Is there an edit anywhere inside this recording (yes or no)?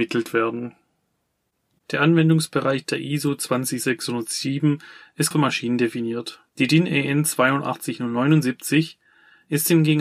yes